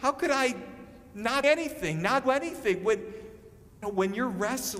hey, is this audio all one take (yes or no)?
no